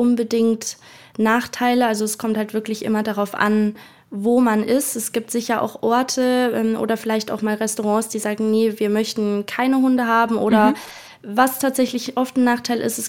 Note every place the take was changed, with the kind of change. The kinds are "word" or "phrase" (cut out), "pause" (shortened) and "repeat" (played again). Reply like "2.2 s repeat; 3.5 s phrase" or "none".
none